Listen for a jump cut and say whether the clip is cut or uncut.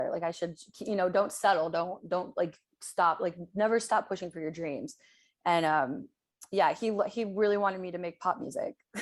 uncut